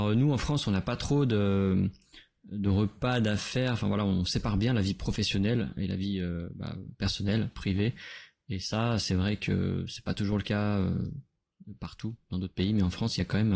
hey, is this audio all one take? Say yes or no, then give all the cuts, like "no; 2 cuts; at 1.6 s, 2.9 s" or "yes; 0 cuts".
yes; 0 cuts